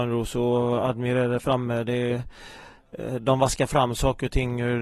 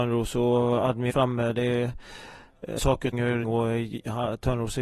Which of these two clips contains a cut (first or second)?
second